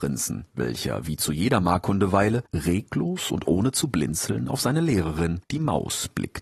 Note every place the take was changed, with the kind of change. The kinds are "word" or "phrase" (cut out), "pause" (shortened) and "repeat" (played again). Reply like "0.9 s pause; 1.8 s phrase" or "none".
2.5 s pause; 5.4 s pause